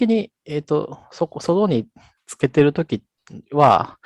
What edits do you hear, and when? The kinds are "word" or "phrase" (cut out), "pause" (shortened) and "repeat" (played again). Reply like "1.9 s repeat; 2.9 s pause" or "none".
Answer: none